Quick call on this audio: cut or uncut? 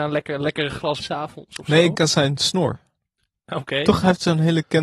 cut